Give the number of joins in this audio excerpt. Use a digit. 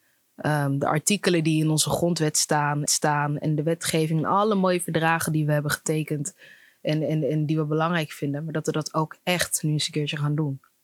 1